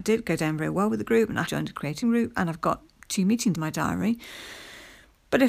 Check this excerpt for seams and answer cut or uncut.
cut